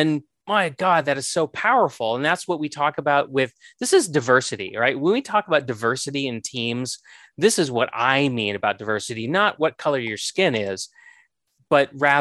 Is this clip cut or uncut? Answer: uncut